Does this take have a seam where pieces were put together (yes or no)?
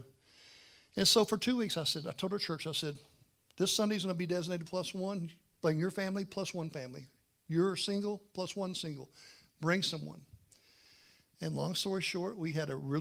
no